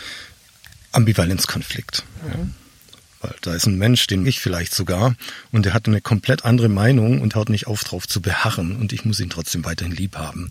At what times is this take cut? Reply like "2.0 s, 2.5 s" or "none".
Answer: 4.2 s, 7.3 s